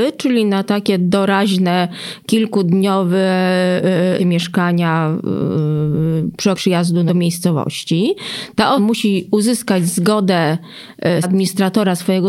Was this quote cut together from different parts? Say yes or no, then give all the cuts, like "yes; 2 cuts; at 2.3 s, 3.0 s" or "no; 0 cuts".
yes; 5 cuts; at 4.2 s, 6.5 s, 7.1 s, 8.8 s, 11.2 s